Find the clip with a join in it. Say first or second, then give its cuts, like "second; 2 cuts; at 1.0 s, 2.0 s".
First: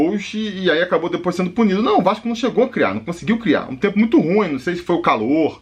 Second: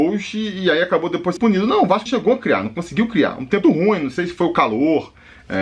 second; 3 cuts; at 1.4 s, 2.1 s, 3.6 s